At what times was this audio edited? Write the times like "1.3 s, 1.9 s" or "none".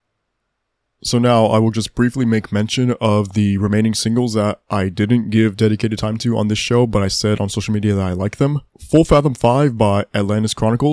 8.7 s